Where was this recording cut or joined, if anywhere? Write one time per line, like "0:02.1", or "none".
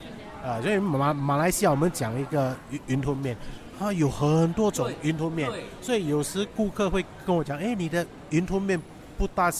none